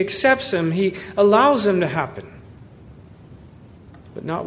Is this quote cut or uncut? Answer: uncut